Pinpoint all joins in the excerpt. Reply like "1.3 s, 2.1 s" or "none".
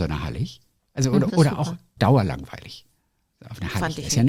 1.3 s, 2.0 s

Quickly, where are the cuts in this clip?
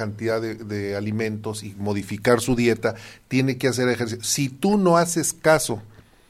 none

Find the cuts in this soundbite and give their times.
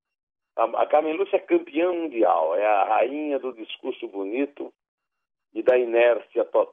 none

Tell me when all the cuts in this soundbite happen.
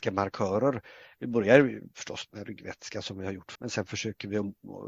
3.5 s

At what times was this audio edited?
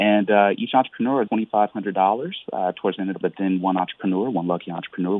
1.3 s, 3.2 s

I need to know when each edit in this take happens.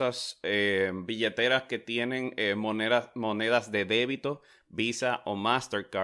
none

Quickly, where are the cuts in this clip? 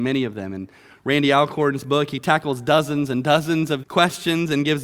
3.8 s

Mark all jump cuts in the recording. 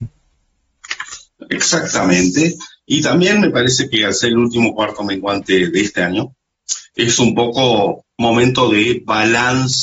none

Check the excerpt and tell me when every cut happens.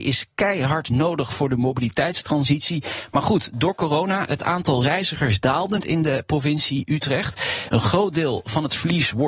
5.8 s

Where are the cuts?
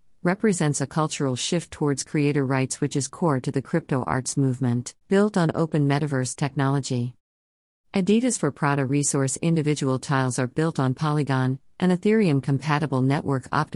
5.0 s

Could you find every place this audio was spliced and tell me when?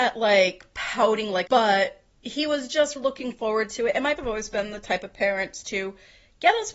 1.5 s, 2.1 s, 3.0 s, 4.2 s

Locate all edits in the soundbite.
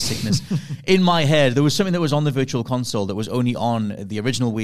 none

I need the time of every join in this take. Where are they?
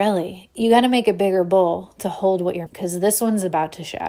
2.7 s

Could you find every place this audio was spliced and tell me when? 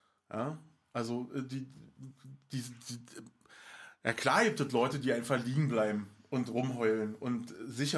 none

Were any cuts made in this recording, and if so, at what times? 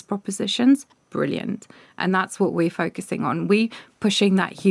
none

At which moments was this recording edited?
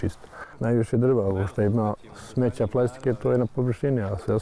none

